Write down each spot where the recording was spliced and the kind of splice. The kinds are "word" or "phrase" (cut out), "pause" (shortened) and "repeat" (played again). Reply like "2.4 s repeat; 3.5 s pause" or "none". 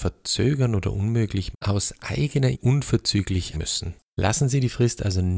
1.5 s word; 2.5 s word; 3.5 s word